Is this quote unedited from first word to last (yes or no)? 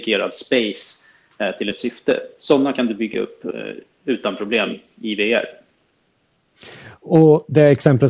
yes